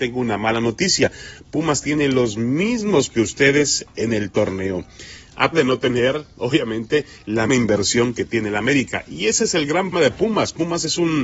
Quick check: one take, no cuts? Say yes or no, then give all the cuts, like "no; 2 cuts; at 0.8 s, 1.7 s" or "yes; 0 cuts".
no; 4 cuts; at 3.1 s, 5.5 s, 7.5 s, 9.9 s